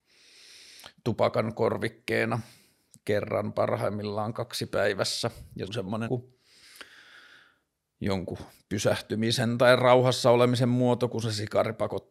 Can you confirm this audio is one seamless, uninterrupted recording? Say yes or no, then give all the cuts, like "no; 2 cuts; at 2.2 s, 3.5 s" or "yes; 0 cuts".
no; 2 cuts; at 5.7 s, 6.1 s